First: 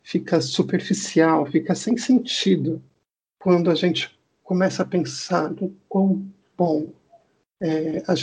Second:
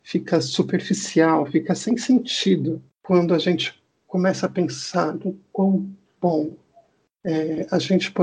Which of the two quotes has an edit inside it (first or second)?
second